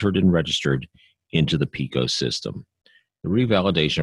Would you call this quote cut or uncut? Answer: uncut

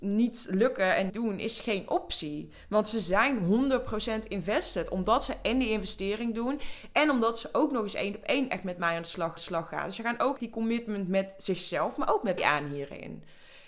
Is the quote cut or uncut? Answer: cut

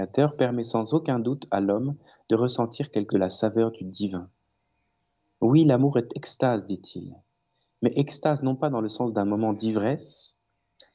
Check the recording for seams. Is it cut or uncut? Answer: cut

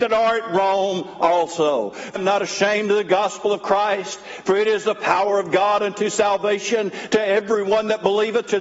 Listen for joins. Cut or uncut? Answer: cut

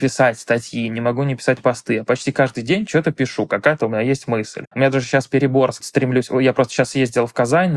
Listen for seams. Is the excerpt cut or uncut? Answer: cut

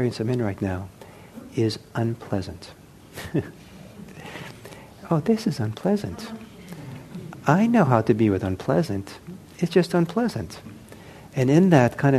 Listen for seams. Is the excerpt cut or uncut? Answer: uncut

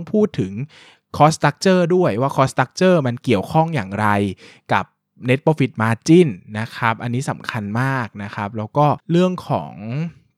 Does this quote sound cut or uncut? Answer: cut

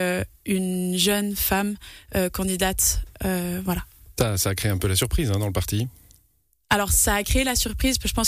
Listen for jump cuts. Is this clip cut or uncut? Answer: uncut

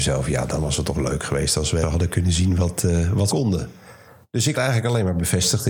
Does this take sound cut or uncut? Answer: cut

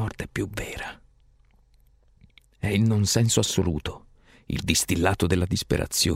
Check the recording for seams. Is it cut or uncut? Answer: uncut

